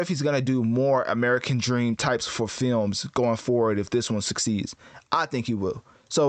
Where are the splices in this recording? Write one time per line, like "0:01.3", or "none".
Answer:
0:02.2

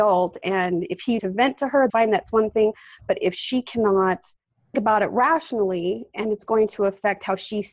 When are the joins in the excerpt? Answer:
0:01.2
0:01.9
0:04.7

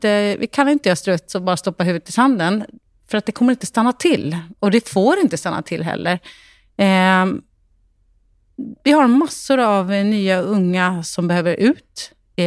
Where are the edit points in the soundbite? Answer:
none

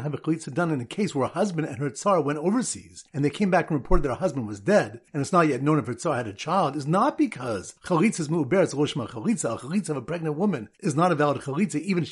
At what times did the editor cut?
0:03.1
0:05.1
0:07.8
0:10.7

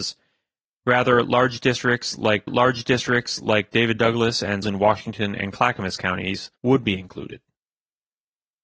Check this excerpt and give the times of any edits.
0:02.5
0:04.6
0:06.6

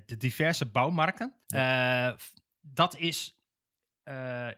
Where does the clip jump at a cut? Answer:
0:01.4

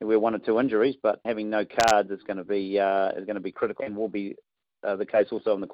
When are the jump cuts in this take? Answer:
0:01.2
0:03.8

